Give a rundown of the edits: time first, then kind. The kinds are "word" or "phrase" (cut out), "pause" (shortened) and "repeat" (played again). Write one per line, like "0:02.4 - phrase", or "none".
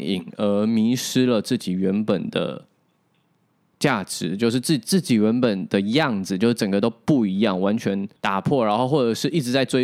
0:08.2 - pause